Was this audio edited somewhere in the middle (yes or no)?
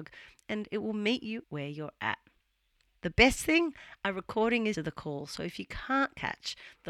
yes